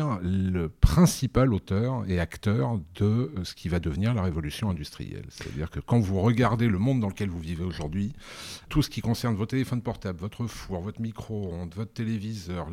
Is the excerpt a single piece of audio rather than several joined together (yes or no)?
no